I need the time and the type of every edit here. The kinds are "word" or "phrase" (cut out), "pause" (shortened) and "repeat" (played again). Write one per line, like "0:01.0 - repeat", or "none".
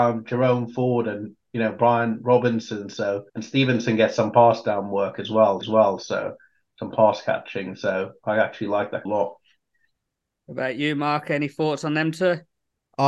0:03.3 - pause
0:05.6 - repeat
0:09.1 - phrase